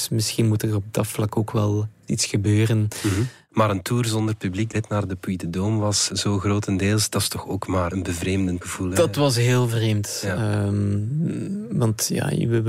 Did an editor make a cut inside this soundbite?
yes; 2 cuts; at 2.1 s, 4.7 s

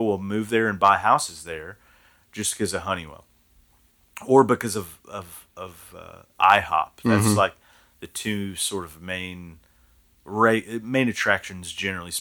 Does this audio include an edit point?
no; 0 cuts

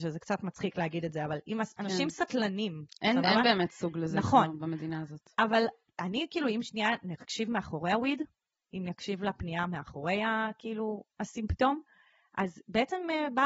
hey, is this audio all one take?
yes; 0 cuts

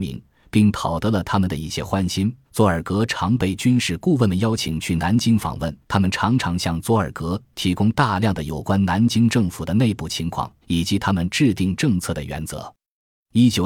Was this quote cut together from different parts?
yes; 3 cuts; at 2.4 s, 5.8 s, 10.6 s

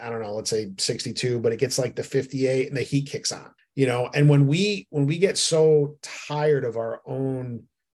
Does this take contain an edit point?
yes; 1 cut; at 3.6 s

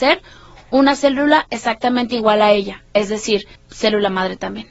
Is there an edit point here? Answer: yes; 1 cut; at 3.6 s

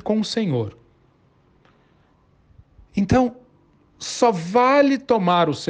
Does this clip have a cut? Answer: no; 0 cuts

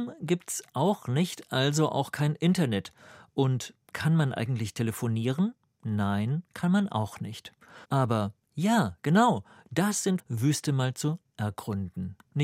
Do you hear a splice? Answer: yes; 2 cuts; at 7.8 s, 10.2 s

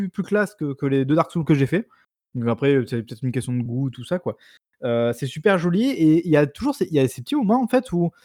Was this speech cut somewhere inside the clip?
no; 0 cuts

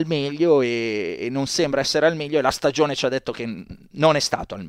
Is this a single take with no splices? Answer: yes; 0 cuts

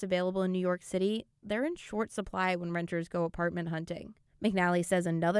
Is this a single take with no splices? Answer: yes; 0 cuts

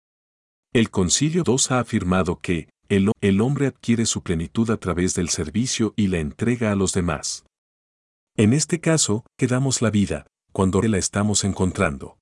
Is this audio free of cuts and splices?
no; 4 cuts; at 1.4 s, 3.1 s, 9.4 s, 10.8 s

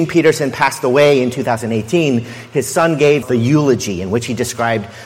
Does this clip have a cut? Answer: yes; 1 cut; at 3.2 s

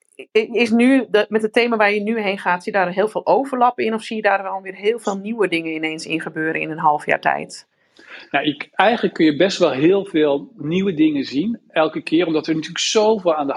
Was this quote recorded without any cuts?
yes; 0 cuts

